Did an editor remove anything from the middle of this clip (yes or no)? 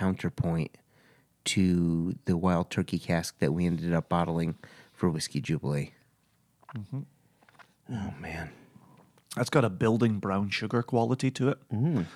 no